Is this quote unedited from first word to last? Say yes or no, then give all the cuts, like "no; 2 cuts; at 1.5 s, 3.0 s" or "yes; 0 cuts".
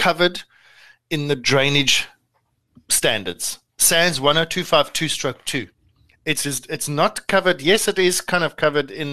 yes; 0 cuts